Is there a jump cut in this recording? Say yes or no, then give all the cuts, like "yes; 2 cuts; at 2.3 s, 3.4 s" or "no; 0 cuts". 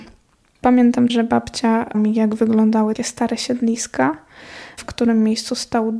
yes; 3 cuts; at 1.1 s, 1.9 s, 3.0 s